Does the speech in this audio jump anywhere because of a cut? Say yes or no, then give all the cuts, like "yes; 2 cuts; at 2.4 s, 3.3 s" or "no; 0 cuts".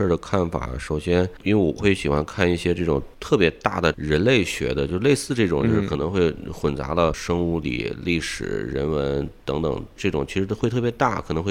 yes; 1 cut; at 7.6 s